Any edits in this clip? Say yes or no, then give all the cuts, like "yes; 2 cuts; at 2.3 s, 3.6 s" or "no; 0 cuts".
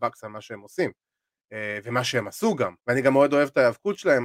yes; 1 cut; at 2.8 s